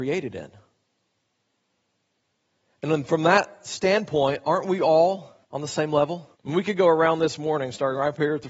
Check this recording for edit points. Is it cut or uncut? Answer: cut